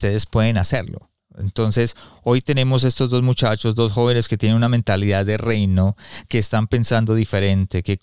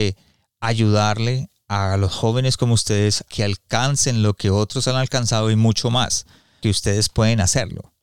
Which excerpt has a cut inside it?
second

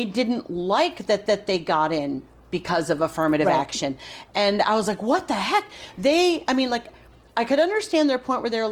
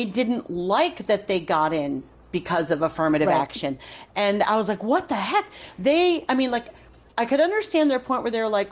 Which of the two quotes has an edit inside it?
first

